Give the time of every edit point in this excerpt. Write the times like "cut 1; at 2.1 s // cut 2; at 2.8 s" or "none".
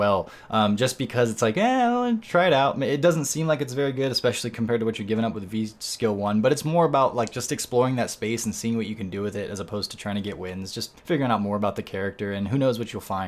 cut 1; at 11.0 s